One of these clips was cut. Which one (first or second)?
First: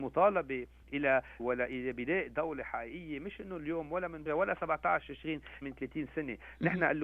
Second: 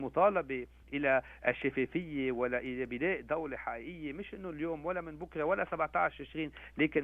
first